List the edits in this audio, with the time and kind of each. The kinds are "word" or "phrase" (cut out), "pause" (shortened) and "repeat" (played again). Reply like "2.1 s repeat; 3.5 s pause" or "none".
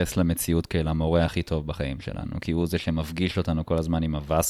none